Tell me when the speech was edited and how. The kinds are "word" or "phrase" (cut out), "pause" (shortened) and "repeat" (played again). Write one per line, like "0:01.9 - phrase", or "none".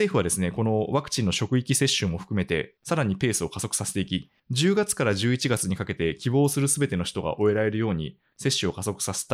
0:04.4 - pause